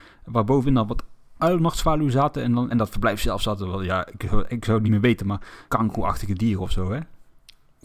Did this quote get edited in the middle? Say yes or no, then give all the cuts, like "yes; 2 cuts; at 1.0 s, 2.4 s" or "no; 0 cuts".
yes; 3 cuts; at 2.7 s, 4.9 s, 5.7 s